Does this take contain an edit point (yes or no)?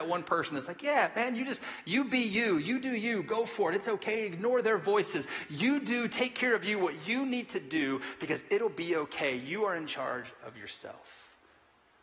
no